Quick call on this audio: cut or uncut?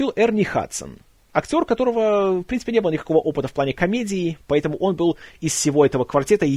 uncut